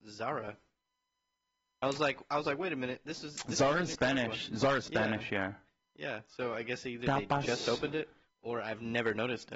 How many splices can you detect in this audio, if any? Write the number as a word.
zero